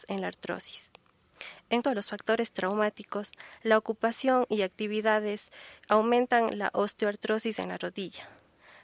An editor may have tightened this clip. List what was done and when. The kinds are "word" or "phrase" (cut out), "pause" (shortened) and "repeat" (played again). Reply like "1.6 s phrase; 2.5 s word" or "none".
1.8 s word; 5.8 s pause